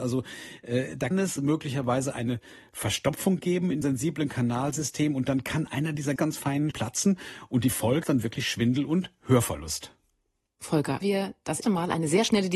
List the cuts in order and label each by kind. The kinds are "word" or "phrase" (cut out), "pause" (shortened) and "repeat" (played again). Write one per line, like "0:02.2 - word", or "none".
0:01.1 - word
0:03.8 - word
0:06.2 - word
0:06.7 - word
0:08.0 - word
0:11.0 - word
0:11.6 - word